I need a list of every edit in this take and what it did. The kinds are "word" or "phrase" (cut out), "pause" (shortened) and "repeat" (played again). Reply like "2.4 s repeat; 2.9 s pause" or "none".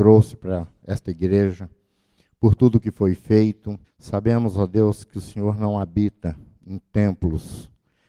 3.8 s pause